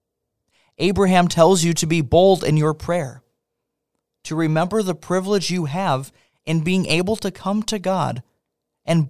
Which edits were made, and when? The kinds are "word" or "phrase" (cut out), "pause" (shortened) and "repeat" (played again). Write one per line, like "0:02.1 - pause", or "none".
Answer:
none